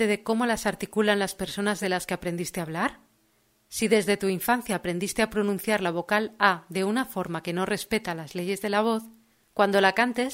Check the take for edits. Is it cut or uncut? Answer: uncut